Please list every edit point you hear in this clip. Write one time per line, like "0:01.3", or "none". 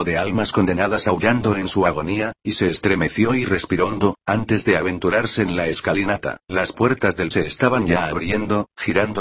0:06.4
0:07.3